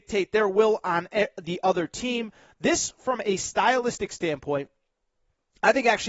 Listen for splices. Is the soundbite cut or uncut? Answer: uncut